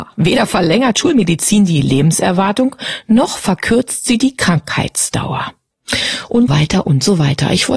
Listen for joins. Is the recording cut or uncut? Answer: cut